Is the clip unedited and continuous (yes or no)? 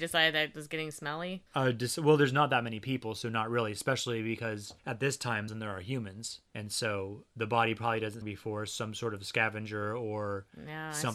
no